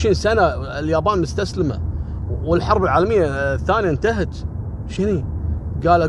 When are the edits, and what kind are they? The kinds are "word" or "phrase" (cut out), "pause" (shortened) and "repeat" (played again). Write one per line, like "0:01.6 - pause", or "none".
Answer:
0:05.0 - word